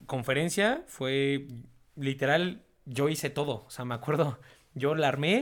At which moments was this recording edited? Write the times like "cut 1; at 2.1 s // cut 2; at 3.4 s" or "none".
none